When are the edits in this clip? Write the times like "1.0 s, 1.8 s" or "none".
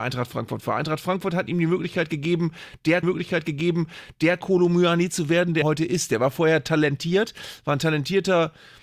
3.0 s, 5.6 s